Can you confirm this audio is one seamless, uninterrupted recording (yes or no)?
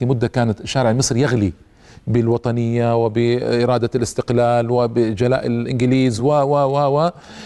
yes